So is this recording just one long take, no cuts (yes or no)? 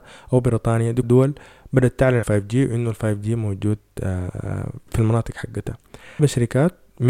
no